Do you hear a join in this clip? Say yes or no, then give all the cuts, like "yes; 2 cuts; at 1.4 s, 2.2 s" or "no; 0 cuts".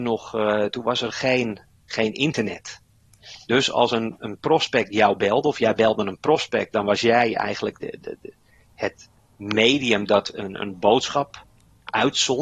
no; 0 cuts